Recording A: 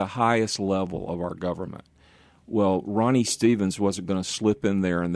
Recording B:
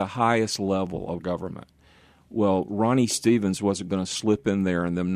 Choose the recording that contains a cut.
B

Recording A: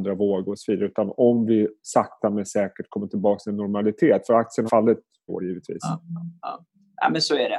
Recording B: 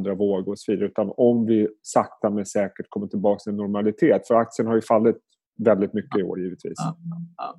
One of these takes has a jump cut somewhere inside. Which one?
A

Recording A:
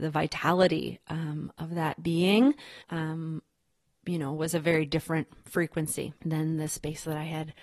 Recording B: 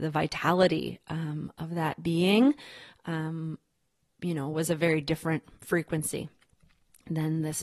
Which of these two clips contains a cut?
A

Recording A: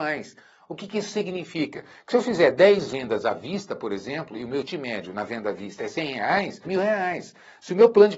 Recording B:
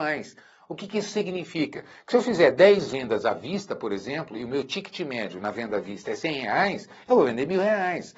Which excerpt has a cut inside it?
A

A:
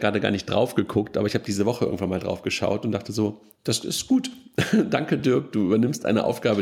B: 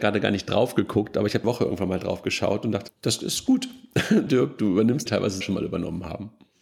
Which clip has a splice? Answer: B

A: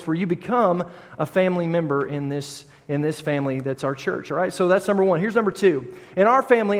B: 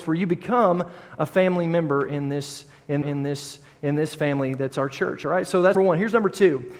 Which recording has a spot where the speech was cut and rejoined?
B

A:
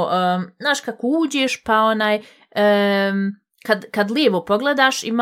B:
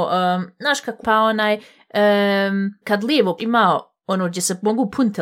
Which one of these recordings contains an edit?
B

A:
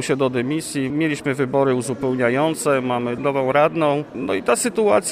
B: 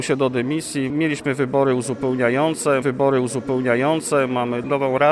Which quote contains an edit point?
B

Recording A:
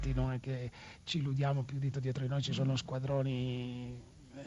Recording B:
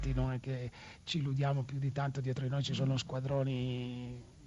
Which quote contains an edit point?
A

